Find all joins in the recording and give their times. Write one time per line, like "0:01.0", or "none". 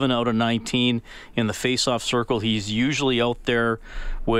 none